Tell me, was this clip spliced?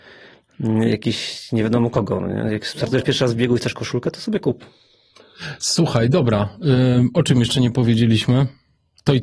no; 0 cuts

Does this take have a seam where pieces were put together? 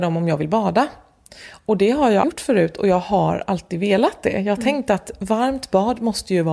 yes; 1 cut; at 2.2 s

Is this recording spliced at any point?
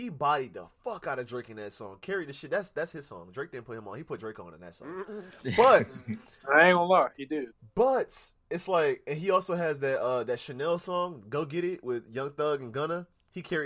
no; 0 cuts

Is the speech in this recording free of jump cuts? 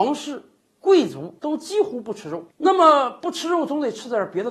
no; 2 cuts; at 1.4 s, 2.5 s

